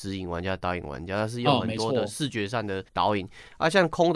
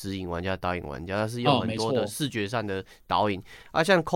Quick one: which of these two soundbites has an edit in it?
first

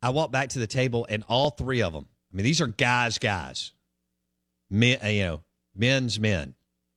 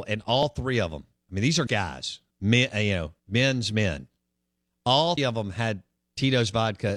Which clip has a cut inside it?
second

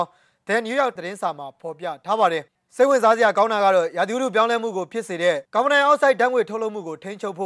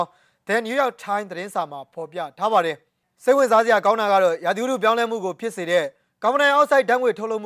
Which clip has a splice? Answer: first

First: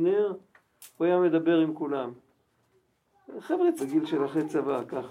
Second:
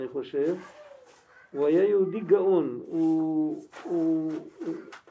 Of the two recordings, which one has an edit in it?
first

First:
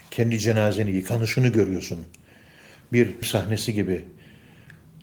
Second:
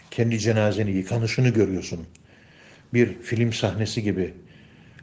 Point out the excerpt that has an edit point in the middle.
first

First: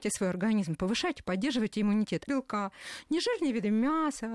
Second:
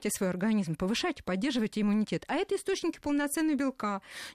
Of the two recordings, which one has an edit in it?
first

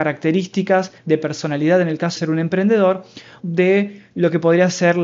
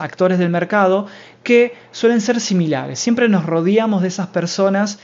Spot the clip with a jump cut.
first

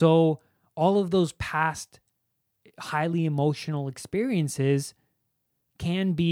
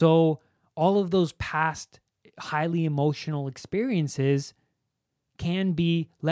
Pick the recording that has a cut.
second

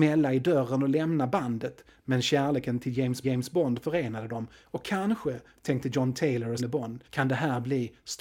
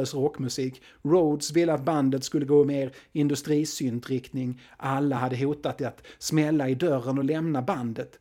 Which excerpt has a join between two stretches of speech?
first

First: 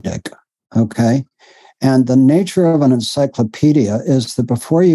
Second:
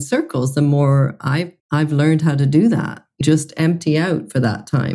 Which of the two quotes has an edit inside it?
second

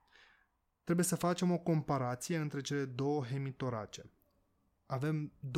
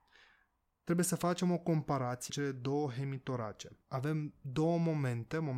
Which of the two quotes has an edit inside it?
second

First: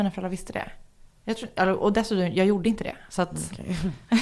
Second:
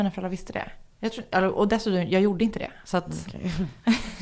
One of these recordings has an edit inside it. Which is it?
second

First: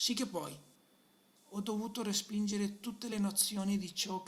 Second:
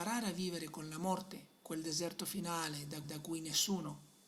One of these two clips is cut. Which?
second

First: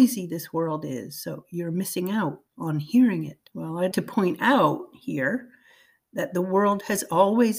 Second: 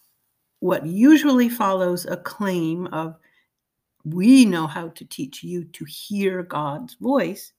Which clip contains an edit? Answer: first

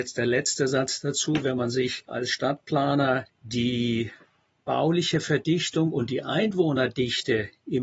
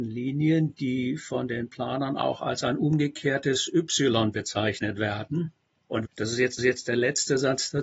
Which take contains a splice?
second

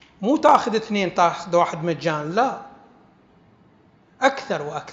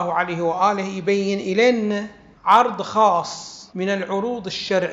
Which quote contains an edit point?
second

